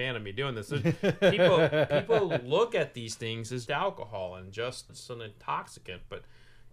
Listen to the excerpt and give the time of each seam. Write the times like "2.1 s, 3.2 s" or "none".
3.7 s, 4.9 s